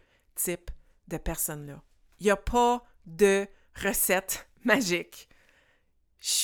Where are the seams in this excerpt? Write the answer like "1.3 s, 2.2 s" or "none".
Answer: none